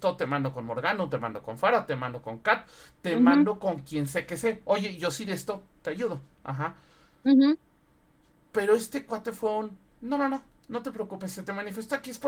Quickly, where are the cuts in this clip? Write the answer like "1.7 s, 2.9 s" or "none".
none

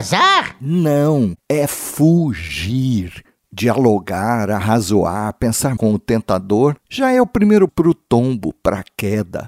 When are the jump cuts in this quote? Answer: 5.8 s, 7.7 s

